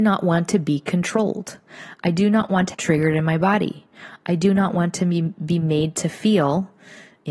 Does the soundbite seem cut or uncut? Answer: cut